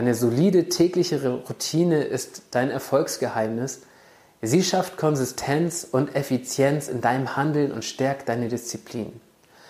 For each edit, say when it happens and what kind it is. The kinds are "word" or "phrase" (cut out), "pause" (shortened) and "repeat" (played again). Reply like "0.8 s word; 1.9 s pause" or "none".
none